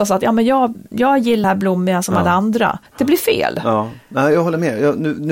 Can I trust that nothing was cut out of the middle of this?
no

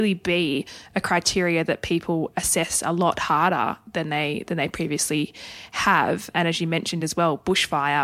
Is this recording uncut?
yes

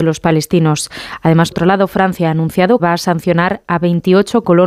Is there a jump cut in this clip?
yes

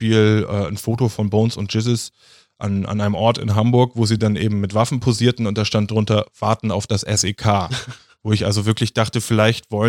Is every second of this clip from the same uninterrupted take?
yes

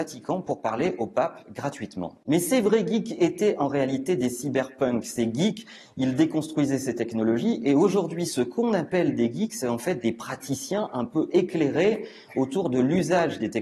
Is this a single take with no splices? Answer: yes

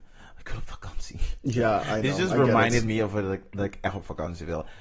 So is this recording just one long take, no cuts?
yes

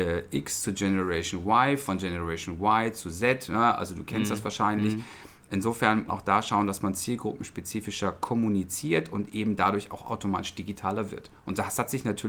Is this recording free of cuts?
no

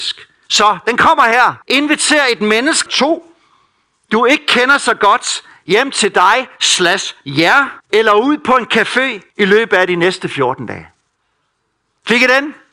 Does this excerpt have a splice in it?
yes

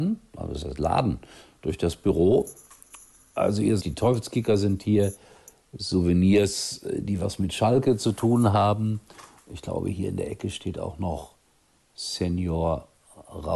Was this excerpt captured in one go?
no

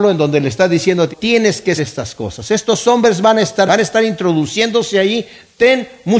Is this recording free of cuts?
no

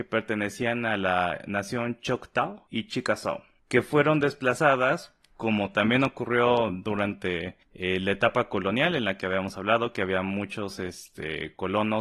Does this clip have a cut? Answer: yes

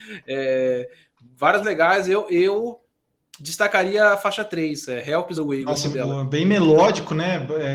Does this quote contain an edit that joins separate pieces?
yes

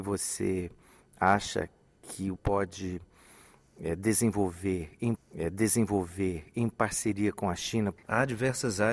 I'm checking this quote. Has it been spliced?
yes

